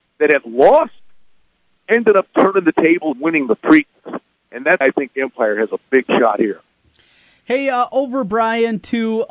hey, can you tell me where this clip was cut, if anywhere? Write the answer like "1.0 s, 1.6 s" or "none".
1.8 s, 3.1 s, 4.8 s, 5.1 s

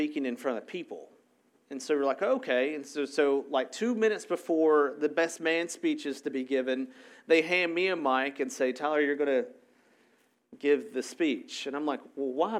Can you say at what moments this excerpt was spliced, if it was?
none

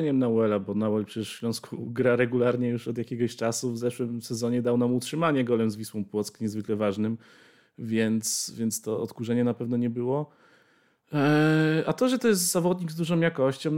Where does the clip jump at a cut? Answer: none

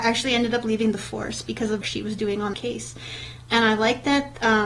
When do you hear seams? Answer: 1.8 s, 2.5 s

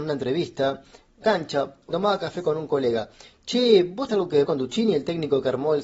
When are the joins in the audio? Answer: 1.2 s, 1.9 s, 4.1 s, 4.4 s

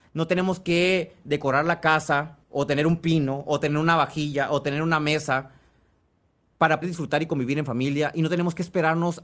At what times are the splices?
2.4 s, 6.8 s

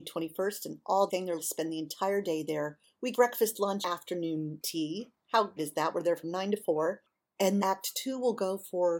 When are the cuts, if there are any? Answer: 1.1 s, 1.4 s, 3.1 s, 3.8 s, 5.6 s, 7.6 s

